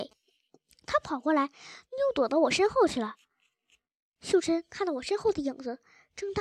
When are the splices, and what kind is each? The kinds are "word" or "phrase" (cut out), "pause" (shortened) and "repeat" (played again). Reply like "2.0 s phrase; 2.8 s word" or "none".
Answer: none